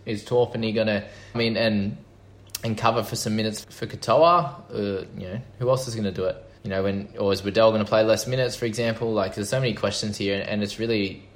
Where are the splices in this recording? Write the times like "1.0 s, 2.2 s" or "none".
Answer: 1.3 s, 3.6 s, 6.6 s